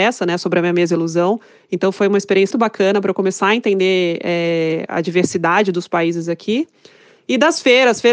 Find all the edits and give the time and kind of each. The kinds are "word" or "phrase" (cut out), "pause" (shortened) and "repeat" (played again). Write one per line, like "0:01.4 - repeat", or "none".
0:02.5 - word